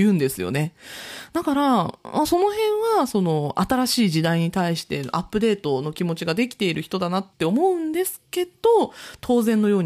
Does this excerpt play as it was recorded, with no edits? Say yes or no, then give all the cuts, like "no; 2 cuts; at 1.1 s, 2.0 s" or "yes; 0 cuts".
no; 1 cut; at 7.3 s